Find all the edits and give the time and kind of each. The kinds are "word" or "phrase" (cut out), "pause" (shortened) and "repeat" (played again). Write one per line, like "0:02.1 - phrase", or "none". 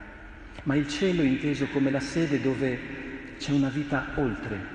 none